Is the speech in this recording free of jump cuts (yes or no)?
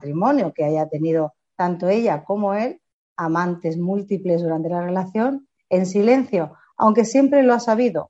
yes